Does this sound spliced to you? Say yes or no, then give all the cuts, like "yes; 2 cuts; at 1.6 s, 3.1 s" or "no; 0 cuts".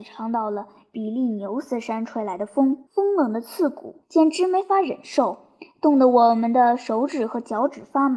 yes; 2 cuts; at 2.9 s, 4.0 s